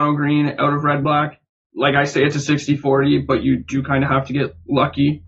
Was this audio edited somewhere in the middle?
no; 0 cuts

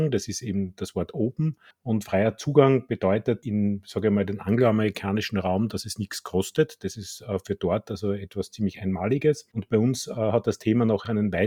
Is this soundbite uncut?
no; 1 cut; at 1.7 s

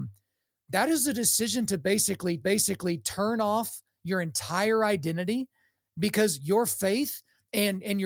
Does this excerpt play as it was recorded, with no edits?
no; 1 cut; at 2.4 s

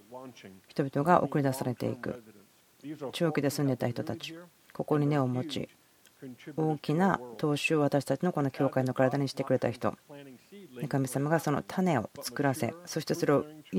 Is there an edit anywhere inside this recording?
no; 0 cuts

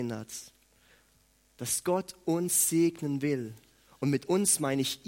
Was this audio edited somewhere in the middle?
no; 0 cuts

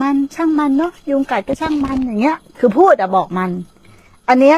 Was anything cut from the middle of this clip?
no; 0 cuts

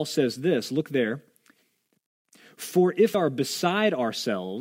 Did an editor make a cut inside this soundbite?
yes; 1 cut; at 3.1 s

